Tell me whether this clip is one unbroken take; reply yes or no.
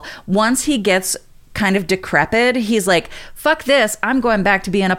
yes